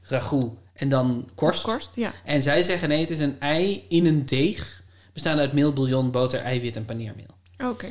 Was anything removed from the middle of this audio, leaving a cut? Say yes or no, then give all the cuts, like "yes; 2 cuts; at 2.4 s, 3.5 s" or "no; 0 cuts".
no; 0 cuts